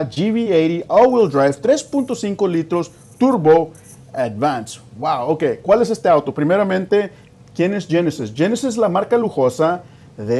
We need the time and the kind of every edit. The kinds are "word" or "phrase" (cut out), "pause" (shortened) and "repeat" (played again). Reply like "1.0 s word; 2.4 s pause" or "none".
none